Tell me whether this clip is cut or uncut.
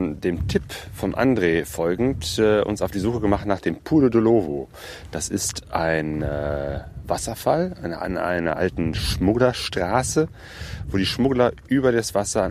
uncut